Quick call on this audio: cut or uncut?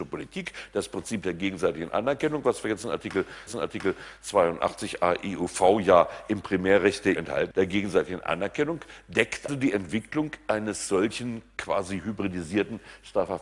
cut